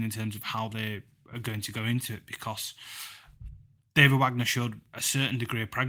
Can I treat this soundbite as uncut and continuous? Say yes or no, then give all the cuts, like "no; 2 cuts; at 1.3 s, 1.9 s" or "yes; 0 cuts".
yes; 0 cuts